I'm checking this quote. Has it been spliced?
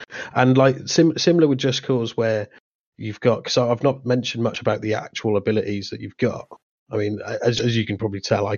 no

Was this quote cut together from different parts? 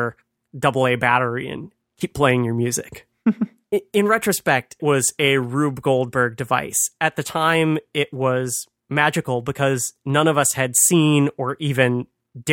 yes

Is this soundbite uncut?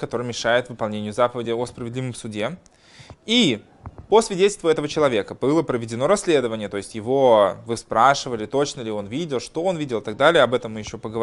yes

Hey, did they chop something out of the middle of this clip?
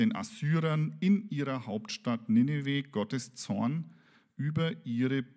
no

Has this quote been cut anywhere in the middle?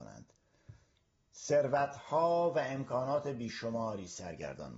no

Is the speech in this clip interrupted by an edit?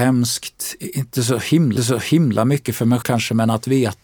yes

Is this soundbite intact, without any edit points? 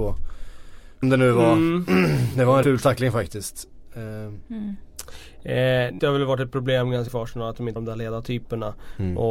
no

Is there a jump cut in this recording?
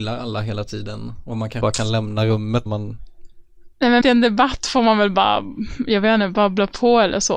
yes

